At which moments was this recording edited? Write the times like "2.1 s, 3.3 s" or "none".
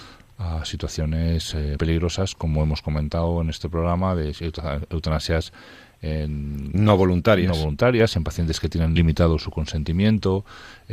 1.8 s, 9.0 s